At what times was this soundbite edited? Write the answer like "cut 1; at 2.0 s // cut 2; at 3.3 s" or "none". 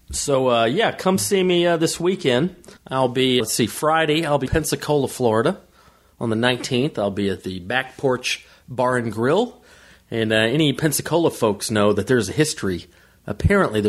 cut 1; at 2.8 s // cut 2; at 3.4 s // cut 3; at 4.5 s